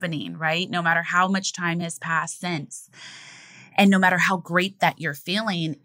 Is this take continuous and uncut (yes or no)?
yes